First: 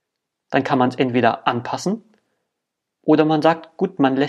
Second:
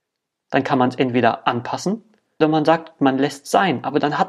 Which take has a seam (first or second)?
second